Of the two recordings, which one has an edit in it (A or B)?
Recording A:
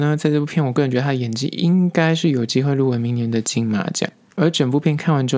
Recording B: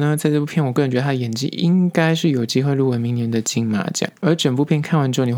B